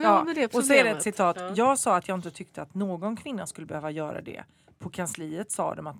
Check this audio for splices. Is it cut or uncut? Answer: uncut